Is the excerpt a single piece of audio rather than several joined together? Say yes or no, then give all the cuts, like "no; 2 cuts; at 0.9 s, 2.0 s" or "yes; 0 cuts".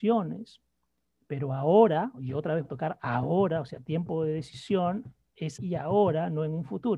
no; 2 cuts; at 2.6 s, 5.6 s